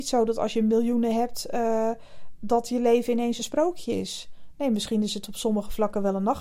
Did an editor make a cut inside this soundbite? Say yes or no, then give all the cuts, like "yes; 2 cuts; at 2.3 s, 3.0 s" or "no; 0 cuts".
no; 0 cuts